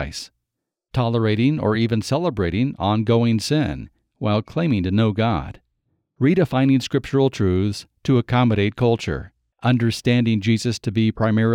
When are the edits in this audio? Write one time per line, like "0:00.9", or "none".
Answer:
none